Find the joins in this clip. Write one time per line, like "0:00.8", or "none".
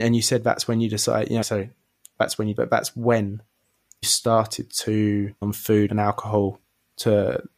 0:01.4
0:02.1
0:02.6
0:04.0
0:05.4
0:05.9